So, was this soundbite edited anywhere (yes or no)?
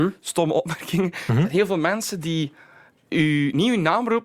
no